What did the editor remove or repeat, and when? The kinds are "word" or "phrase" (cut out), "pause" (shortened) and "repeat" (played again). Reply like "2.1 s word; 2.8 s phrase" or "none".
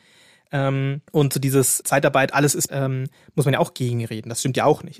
1.1 s pause; 1.8 s word; 2.7 s word